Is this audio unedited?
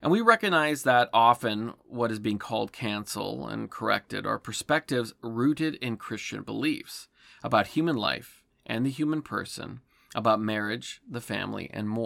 yes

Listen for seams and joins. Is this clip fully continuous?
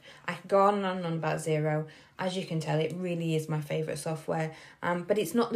yes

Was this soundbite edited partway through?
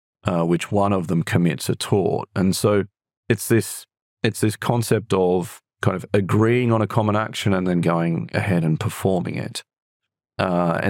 no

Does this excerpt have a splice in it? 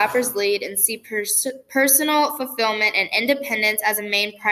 no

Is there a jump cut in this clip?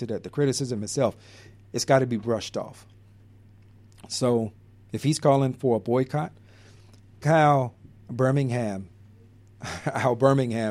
yes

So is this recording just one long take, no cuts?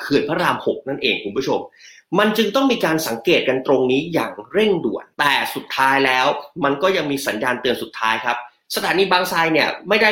no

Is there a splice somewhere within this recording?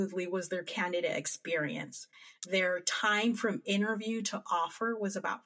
no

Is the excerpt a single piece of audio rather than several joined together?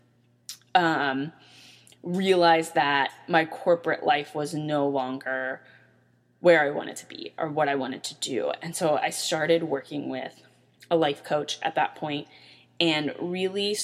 yes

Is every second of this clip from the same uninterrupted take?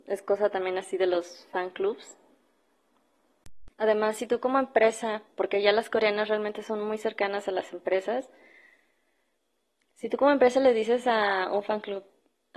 no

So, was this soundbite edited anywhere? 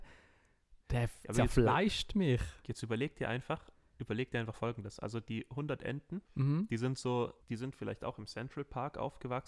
yes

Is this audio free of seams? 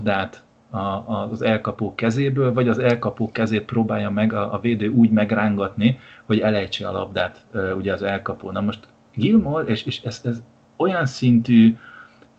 yes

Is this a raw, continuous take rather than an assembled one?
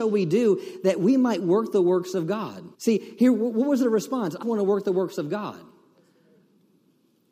no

